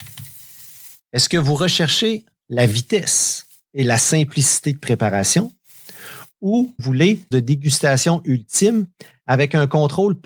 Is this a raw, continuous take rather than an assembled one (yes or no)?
no